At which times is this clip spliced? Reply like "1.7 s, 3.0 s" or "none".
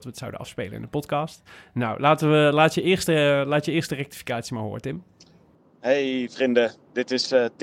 none